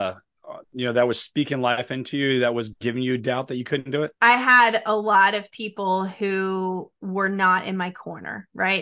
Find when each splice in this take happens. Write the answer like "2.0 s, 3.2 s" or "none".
4.2 s